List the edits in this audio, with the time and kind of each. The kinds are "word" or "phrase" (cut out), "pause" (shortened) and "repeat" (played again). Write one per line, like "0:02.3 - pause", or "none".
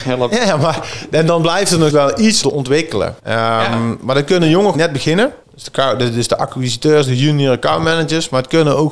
0:01.9 - word
0:02.4 - word
0:03.2 - pause
0:04.7 - phrase
0:05.4 - pause